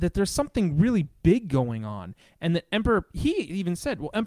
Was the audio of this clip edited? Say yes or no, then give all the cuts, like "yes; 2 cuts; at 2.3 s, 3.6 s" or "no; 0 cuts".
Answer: no; 0 cuts